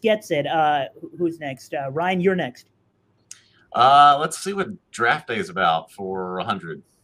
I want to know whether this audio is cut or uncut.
uncut